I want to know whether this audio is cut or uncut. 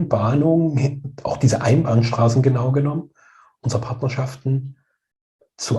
uncut